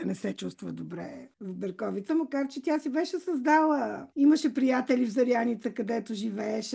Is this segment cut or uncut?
cut